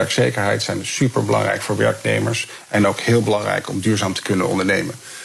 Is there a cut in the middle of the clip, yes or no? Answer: no